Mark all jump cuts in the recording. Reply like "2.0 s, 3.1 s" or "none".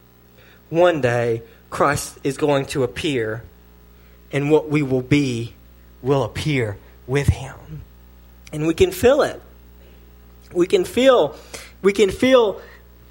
none